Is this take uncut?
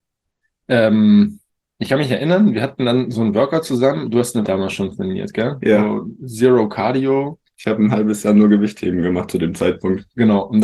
no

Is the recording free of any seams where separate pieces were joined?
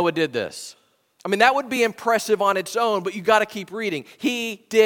yes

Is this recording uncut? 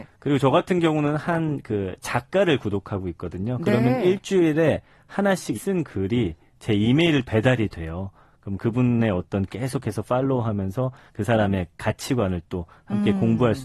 no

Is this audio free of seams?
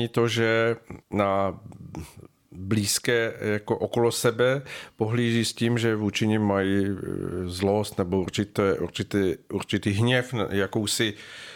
no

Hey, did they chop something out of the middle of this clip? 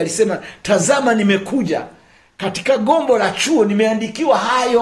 no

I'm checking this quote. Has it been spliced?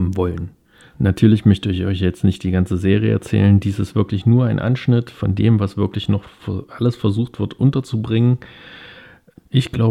no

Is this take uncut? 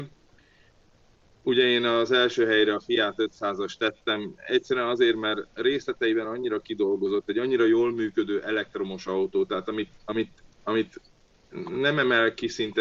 yes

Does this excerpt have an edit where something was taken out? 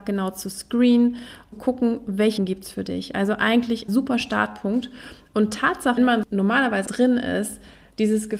yes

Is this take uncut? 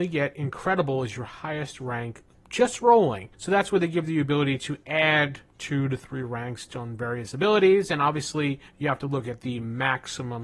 no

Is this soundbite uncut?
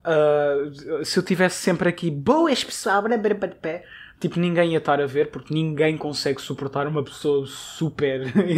yes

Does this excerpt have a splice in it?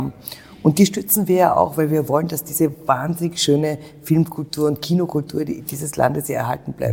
no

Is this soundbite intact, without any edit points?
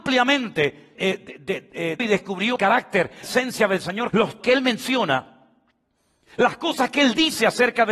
no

